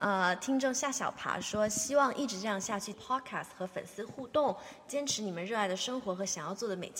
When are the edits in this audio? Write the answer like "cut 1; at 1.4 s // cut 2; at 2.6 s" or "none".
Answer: cut 1; at 2.9 s